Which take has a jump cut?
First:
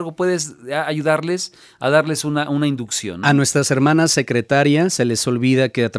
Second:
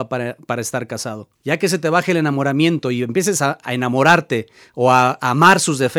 second; 1 cut; at 1.4 s

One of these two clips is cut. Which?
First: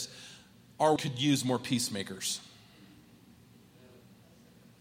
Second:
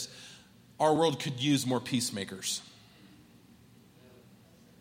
first; 1 cut; at 1.0 s

